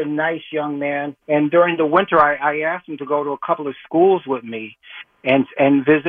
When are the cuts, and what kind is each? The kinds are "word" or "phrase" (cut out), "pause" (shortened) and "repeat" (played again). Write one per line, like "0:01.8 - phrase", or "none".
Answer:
0:01.2 - pause